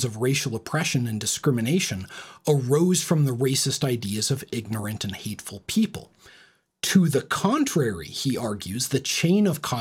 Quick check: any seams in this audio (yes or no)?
no